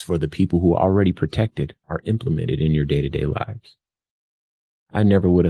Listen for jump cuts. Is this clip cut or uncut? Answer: uncut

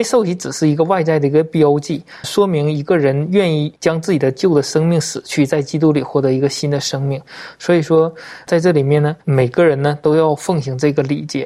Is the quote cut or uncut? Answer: cut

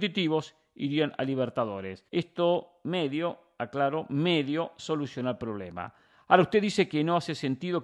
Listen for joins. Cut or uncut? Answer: cut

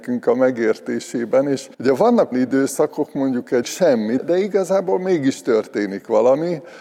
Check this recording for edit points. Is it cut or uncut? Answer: cut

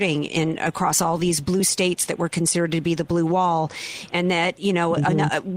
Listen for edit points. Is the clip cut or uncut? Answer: uncut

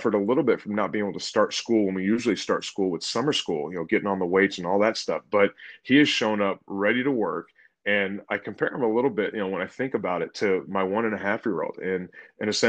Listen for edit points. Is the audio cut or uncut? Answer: uncut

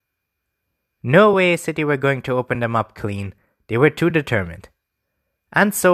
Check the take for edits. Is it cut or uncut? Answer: uncut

